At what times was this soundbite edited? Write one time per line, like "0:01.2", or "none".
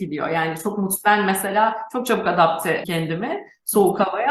0:02.8